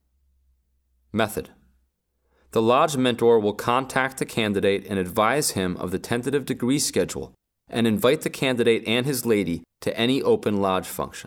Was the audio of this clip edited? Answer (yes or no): no